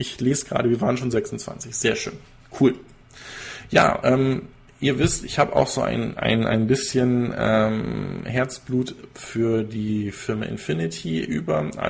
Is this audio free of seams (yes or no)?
yes